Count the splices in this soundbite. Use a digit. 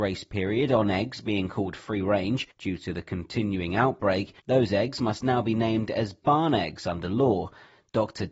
2